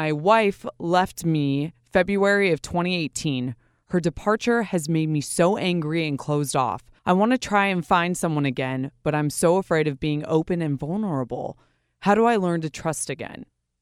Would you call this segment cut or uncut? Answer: cut